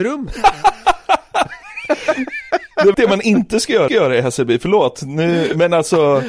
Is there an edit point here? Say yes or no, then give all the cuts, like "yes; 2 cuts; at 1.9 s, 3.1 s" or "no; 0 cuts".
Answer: yes; 2 cuts; at 2.9 s, 3.9 s